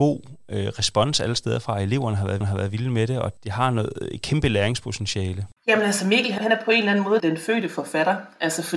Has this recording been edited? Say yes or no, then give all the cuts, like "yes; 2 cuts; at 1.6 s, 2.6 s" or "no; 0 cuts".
yes; 4 cuts; at 2.4 s, 5.6 s, 6.4 s, 7.2 s